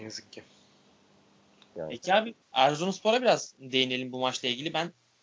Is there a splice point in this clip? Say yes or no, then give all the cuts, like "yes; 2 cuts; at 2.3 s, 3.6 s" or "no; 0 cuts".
yes; 1 cut; at 2.4 s